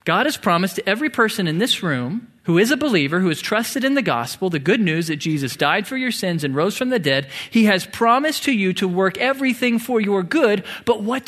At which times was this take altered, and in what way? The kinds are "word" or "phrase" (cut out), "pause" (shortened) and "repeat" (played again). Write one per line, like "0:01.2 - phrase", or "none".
0:02.4 - pause